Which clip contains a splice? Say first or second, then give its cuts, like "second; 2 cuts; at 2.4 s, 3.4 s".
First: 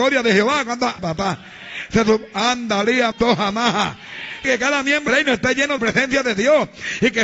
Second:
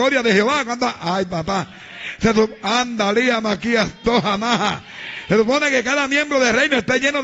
first; 5 cuts; at 1.0 s, 3.1 s, 4.4 s, 5.1 s, 5.8 s